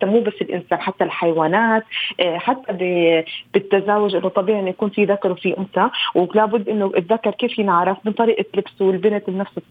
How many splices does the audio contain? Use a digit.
0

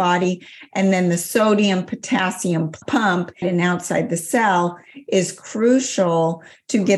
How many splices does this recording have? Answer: 1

